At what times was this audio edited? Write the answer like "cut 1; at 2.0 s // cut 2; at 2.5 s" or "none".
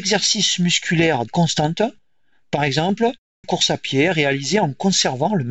cut 1; at 1.3 s // cut 2; at 3.4 s